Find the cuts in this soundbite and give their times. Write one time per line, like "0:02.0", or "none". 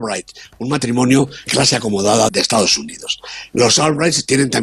0:01.5
0:02.3